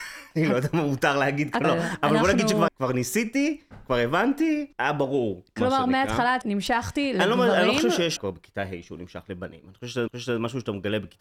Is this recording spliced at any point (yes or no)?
yes